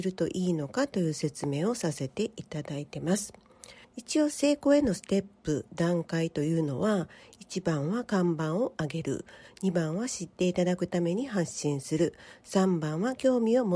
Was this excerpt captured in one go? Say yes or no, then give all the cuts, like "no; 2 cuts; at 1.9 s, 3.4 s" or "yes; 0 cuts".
no; 1 cut; at 3.8 s